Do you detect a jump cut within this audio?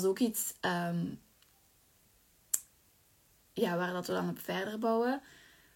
no; 0 cuts

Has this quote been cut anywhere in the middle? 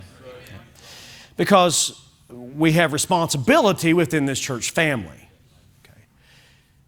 no; 0 cuts

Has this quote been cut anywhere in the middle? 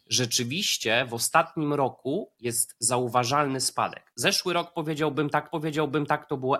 yes; 1 cut; at 5.5 s

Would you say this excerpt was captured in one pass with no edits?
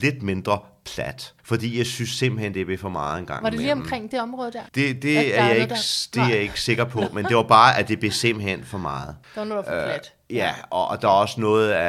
no; 3 cuts; at 1.4 s, 4.7 s, 9.2 s

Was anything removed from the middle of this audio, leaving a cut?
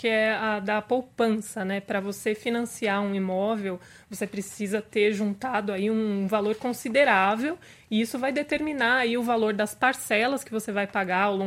no; 0 cuts

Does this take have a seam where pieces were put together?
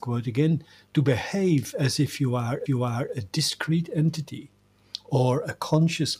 yes; 1 cut; at 2.7 s

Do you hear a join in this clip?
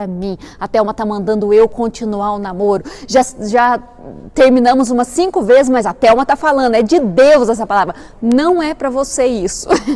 no; 0 cuts

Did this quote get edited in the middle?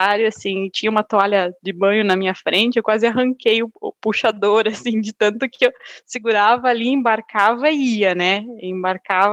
no; 0 cuts

